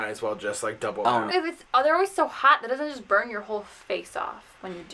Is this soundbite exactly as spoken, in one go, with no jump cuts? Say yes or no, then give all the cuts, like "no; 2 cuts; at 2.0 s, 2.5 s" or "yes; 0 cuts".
no; 1 cut; at 1.3 s